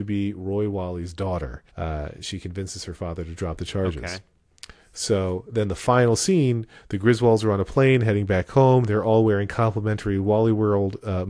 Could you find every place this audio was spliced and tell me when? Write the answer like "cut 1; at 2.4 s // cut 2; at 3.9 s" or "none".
cut 1; at 1.7 s